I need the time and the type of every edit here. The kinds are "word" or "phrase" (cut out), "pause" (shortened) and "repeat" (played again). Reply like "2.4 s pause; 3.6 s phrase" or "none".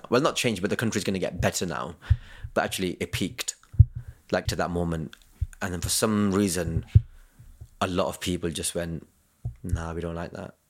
4.5 s phrase